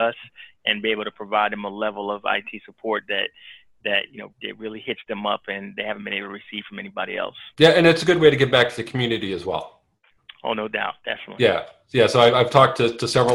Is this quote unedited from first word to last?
no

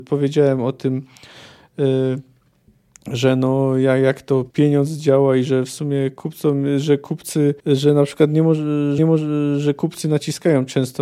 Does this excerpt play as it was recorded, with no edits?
no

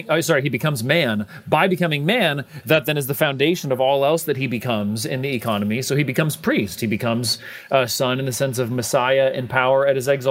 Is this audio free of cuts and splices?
yes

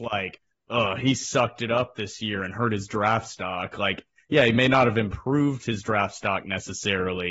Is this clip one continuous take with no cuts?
yes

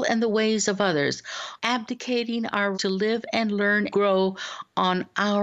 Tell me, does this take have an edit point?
yes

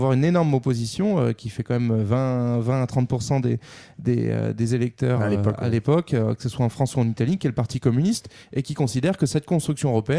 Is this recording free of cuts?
yes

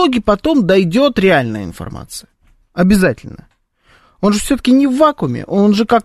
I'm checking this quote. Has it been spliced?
no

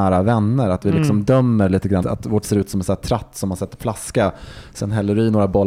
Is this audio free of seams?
no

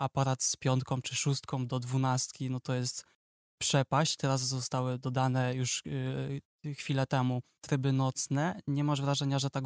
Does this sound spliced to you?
no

